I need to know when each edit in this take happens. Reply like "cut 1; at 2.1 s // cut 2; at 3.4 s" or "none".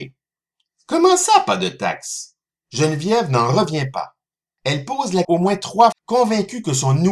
cut 1; at 5.2 s // cut 2; at 5.9 s